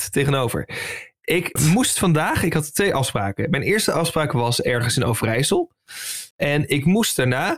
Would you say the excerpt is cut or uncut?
cut